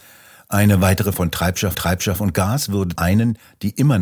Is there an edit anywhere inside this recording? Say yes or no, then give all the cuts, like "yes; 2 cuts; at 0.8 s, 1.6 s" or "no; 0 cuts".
yes; 3 cuts; at 1.1 s, 1.7 s, 3.0 s